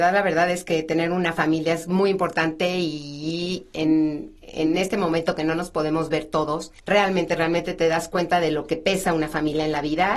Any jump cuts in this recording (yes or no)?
yes